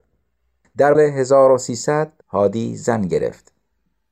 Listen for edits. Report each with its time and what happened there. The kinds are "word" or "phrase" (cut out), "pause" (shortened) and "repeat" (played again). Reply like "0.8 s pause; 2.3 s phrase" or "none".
0.9 s phrase; 2.2 s pause

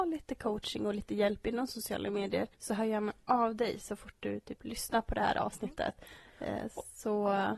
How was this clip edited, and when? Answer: 2.5 s pause

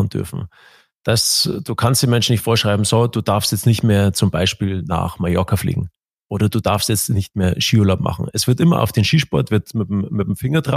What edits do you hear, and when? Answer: none

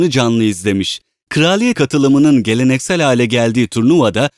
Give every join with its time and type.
1.7 s word

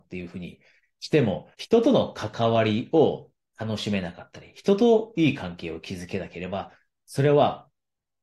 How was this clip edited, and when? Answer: 1.5 s pause

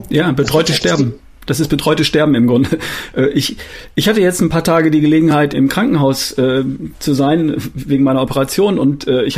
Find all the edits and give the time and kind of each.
5.5 s word

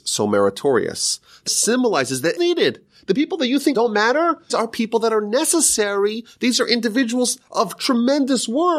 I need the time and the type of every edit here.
1.5 s word; 2.4 s word; 3.7 s word; 4.5 s word

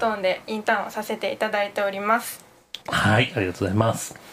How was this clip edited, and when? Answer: 2.8 s pause

